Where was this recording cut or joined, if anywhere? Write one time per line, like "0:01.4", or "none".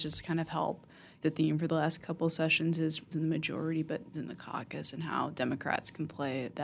0:01.2
0:03.1
0:04.1